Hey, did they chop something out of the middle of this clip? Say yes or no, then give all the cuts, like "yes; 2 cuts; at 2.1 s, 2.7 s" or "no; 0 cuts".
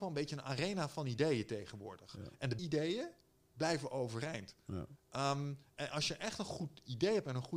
yes; 2 cuts; at 2.6 s, 5.9 s